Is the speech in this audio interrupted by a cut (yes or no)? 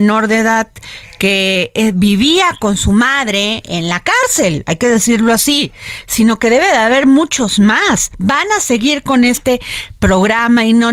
no